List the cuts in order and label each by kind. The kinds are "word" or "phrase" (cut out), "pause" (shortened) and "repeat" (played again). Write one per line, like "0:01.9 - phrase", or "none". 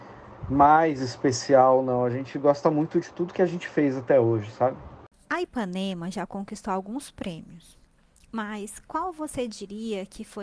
none